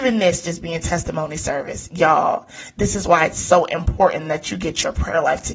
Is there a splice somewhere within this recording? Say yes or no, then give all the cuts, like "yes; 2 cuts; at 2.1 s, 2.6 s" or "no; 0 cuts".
no; 0 cuts